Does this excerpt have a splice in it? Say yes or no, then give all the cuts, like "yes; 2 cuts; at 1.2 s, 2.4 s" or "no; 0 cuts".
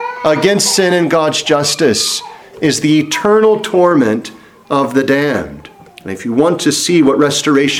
no; 0 cuts